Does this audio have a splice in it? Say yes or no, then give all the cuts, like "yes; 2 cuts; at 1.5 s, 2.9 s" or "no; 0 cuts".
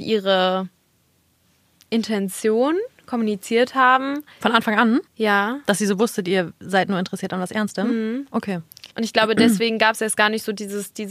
yes; 2 cuts; at 5.1 s, 8.9 s